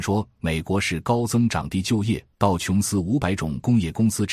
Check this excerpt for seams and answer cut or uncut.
cut